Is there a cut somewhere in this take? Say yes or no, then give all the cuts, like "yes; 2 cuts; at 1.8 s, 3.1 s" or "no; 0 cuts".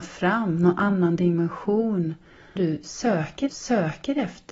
yes; 2 cuts; at 2.6 s, 3.5 s